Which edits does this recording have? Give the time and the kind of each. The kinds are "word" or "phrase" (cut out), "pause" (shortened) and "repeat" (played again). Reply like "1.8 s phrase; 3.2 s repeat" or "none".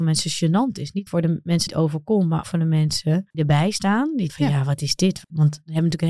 1.1 s word; 1.7 s word; 2.4 s word; 3.3 s word; 4.3 s word